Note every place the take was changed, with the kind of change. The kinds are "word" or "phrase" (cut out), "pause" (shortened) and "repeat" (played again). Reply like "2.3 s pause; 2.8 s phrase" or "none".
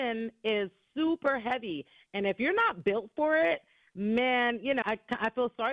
4.8 s word